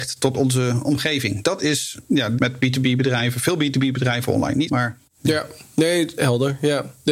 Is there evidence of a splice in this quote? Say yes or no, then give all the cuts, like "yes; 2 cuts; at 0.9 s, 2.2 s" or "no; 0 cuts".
yes; 2 cuts; at 2.4 s, 4.7 s